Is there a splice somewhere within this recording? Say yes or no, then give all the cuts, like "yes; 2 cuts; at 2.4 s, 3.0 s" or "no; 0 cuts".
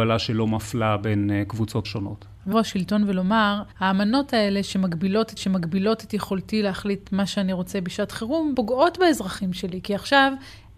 yes; 5 cuts; at 1.8 s, 2.5 s, 3.7 s, 5.4 s, 8.5 s